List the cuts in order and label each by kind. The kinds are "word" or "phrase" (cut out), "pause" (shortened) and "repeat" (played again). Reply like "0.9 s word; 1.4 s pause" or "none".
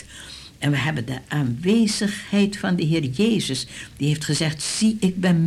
none